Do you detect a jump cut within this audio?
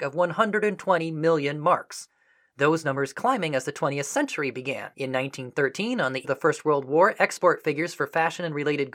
yes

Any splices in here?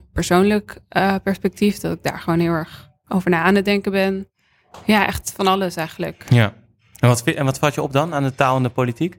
no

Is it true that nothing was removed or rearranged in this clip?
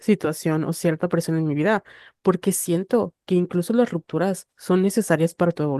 yes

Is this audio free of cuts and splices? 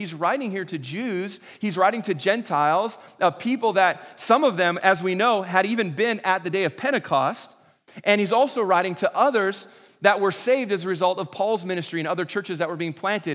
yes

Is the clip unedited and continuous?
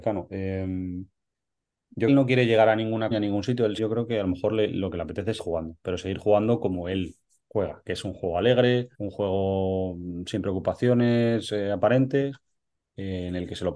no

